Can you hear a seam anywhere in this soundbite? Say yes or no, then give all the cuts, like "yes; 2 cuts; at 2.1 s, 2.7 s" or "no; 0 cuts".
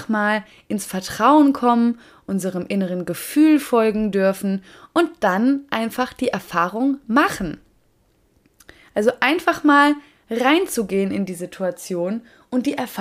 no; 0 cuts